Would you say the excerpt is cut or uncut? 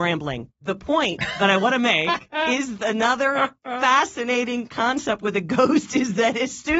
uncut